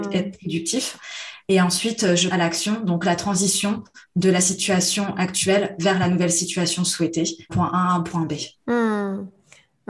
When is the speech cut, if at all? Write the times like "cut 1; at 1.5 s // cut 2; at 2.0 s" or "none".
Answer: cut 1; at 2.3 s // cut 2; at 7.5 s // cut 3; at 8.6 s